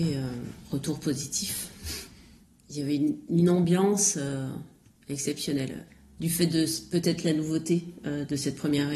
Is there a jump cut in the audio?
no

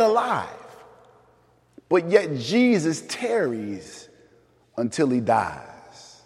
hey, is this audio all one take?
yes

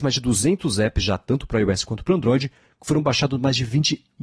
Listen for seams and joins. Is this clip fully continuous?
yes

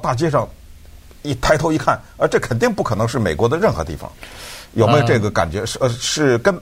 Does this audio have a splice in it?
no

